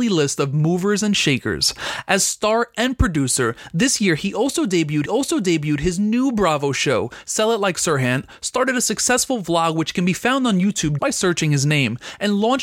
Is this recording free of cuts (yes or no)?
no